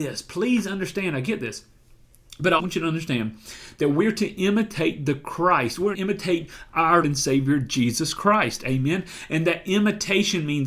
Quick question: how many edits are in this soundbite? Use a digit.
3